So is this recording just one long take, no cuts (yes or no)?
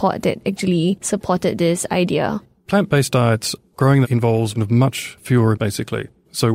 no